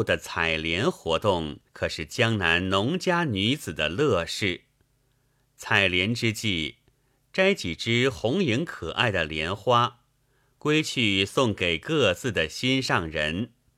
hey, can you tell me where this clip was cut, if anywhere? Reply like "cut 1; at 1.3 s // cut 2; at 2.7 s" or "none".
cut 1; at 1.7 s

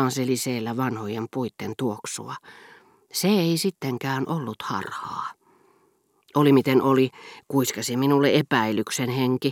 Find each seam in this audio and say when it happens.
none

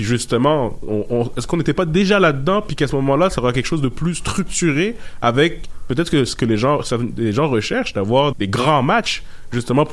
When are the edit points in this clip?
cut 1; at 8.3 s

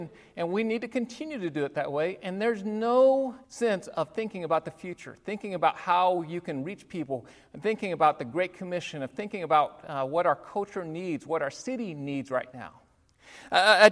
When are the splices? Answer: cut 1; at 3.4 s

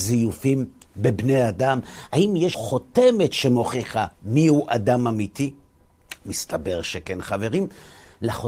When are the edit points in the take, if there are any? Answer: cut 1; at 2.5 s // cut 2; at 4.1 s // cut 3; at 6.2 s

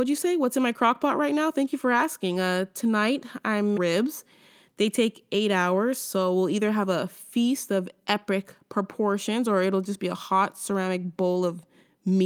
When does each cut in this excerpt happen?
cut 1; at 3.8 s

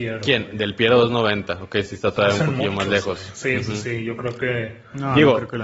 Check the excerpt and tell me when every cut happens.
none

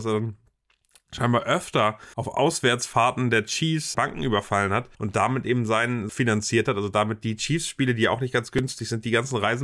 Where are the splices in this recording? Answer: cut 1; at 2.1 s // cut 2; at 3.9 s // cut 3; at 4.9 s // cut 4; at 6.1 s

